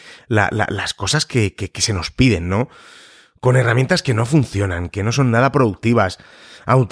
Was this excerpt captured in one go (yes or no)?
yes